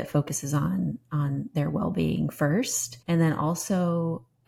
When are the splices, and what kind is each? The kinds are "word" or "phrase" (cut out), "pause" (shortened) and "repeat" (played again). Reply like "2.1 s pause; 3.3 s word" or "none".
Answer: 3.0 s pause